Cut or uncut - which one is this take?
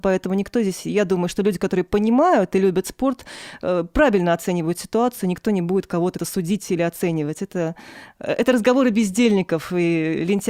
cut